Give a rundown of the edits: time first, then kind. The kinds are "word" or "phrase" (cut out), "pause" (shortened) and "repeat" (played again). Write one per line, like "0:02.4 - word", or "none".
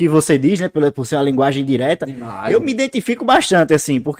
none